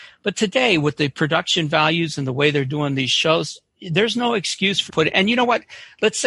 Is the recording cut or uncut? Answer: cut